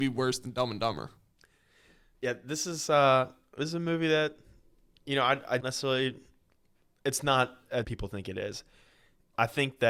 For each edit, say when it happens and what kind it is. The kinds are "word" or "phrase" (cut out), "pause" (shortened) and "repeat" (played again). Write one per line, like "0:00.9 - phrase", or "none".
0:05.6 - word
0:07.8 - phrase